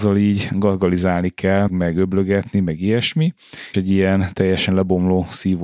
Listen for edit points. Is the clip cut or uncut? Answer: cut